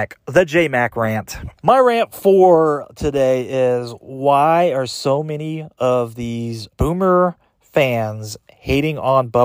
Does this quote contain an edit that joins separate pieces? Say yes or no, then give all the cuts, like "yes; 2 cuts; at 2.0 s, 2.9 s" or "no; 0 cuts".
yes; 2 cuts; at 1.6 s, 6.7 s